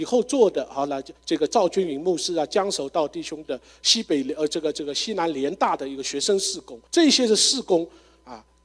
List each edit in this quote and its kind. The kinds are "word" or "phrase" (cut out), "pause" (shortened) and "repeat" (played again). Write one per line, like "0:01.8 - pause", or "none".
0:01.2 - pause
0:06.9 - pause